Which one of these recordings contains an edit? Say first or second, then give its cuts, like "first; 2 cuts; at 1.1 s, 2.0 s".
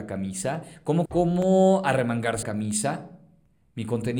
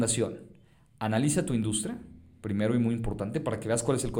first; 2 cuts; at 1.1 s, 2.4 s